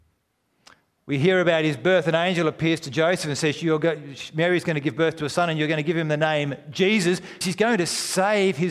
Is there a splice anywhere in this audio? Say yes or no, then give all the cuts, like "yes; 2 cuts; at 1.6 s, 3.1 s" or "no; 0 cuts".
yes; 1 cut; at 7.4 s